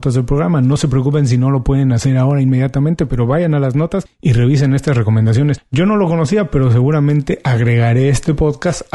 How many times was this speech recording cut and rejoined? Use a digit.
0